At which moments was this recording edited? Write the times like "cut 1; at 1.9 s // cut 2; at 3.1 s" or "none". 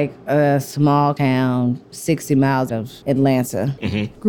cut 1; at 1.2 s // cut 2; at 2.7 s // cut 3; at 3.0 s